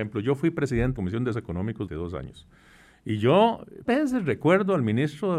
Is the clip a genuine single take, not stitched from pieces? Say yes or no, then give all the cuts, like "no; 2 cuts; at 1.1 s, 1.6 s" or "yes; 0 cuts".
no; 4 cuts; at 1.0 s, 1.3 s, 1.9 s, 3.9 s